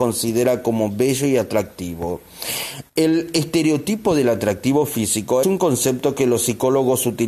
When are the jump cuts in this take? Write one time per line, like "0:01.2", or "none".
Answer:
0:05.4